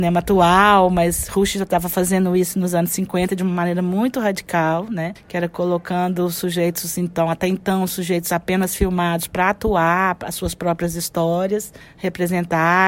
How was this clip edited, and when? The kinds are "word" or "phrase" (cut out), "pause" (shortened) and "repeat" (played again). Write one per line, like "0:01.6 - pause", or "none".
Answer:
0:05.2 - pause
0:11.8 - pause